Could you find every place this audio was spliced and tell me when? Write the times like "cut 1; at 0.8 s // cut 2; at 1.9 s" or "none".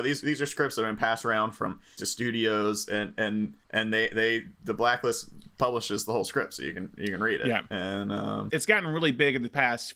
cut 1; at 2.0 s // cut 2; at 3.6 s // cut 3; at 8.5 s